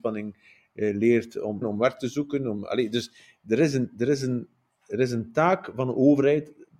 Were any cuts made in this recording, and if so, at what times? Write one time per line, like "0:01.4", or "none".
0:01.6